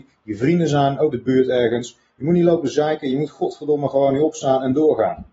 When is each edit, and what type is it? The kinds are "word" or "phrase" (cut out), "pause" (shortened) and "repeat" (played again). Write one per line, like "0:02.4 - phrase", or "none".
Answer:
0:01.1 - word

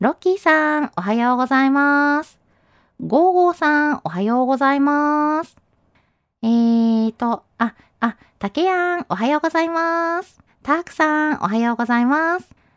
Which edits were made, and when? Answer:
0:07.9 - repeat
0:10.5 - pause

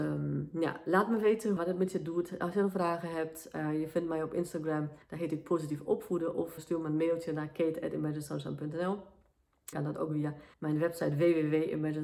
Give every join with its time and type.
0:01.6 - word
0:05.0 - pause
0:06.6 - word
0:09.7 - phrase
0:10.5 - pause

